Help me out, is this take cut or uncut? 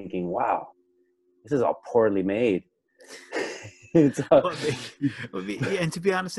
uncut